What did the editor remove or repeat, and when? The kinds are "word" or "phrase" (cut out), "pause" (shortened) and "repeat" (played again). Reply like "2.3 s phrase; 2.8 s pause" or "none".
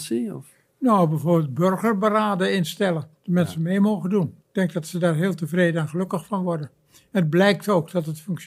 3.2 s pause; 4.4 s pause